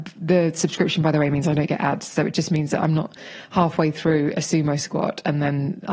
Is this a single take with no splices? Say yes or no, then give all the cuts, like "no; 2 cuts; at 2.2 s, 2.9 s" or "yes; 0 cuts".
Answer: yes; 0 cuts